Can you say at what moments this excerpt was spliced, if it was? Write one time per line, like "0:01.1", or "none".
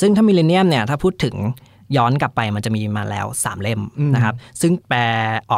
none